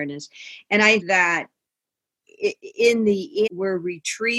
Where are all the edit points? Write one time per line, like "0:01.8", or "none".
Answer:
0:01.0
0:03.5